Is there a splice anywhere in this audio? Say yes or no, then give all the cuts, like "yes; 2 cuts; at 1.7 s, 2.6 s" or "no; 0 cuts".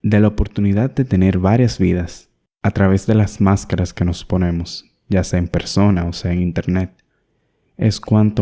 no; 0 cuts